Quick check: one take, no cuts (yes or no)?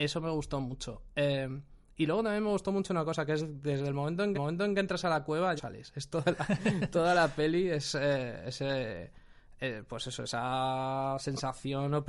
no